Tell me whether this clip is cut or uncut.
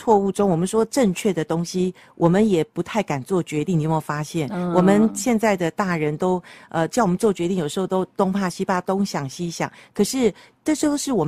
uncut